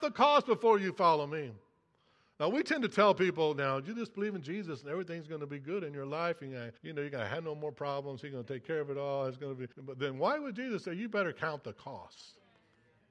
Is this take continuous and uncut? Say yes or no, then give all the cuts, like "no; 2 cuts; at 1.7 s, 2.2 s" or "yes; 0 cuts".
no; 2 cuts; at 6.8 s, 9.7 s